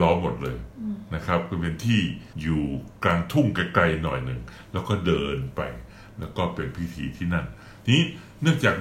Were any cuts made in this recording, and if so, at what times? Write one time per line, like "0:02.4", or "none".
0:02.3